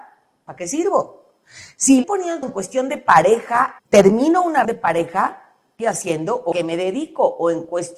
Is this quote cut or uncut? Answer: cut